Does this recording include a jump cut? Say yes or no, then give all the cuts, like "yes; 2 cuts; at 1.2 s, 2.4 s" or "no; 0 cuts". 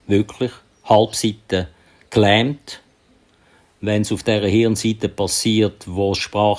no; 0 cuts